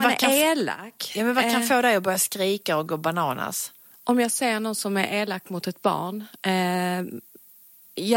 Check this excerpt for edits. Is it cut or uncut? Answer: uncut